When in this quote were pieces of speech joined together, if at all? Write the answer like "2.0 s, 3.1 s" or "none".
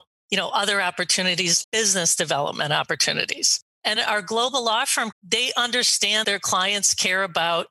1.6 s, 4.0 s, 5.1 s, 6.2 s